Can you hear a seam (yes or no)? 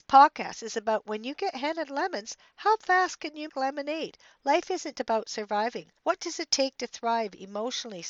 yes